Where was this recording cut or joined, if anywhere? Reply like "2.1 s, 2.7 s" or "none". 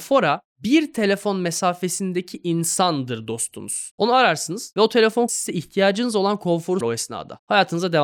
5.3 s, 6.8 s